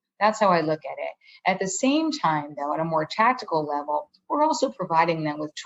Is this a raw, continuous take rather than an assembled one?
yes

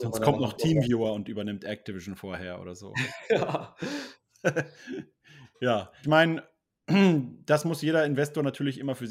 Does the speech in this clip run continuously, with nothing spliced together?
no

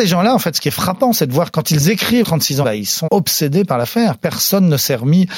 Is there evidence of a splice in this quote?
yes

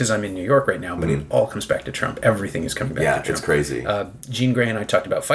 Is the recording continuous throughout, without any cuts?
yes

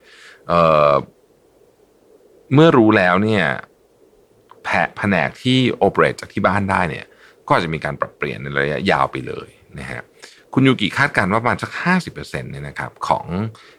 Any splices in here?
no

